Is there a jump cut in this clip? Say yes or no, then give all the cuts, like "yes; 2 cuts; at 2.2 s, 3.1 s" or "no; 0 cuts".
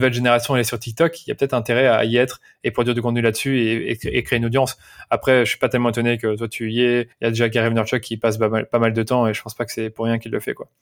yes; 1 cut; at 7.1 s